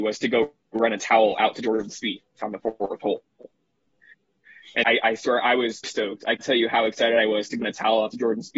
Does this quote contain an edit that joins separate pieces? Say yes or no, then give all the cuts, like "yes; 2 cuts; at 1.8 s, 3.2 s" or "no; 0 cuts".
yes; 4 cuts; at 4.8 s, 5.8 s, 6.4 s, 7.6 s